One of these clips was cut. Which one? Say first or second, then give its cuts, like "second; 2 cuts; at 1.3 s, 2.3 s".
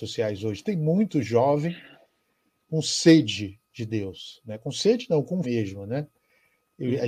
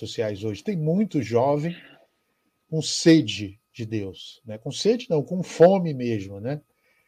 first; 1 cut; at 5.4 s